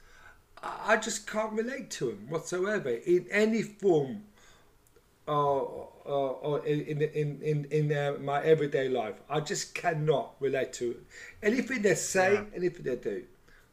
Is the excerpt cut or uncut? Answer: uncut